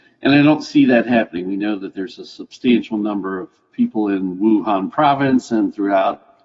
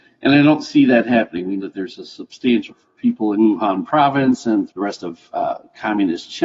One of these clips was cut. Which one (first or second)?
second